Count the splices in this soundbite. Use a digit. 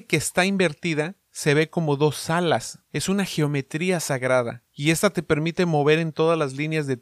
3